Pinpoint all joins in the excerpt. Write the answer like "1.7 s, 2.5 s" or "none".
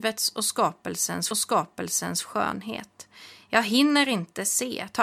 1.3 s